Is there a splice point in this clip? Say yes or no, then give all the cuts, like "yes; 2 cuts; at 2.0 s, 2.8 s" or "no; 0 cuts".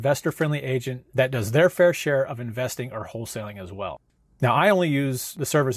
no; 0 cuts